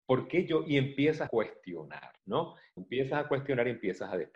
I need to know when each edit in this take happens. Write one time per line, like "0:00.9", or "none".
0:01.3
0:02.2
0:02.8